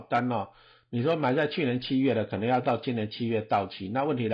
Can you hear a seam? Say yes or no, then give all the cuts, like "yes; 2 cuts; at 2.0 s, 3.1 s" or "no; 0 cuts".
no; 0 cuts